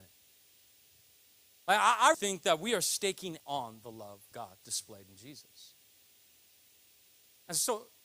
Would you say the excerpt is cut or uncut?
cut